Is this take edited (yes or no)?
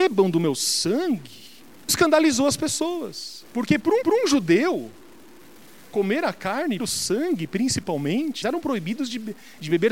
yes